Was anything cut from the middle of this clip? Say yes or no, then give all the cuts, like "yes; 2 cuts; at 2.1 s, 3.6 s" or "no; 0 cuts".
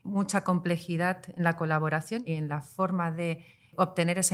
no; 0 cuts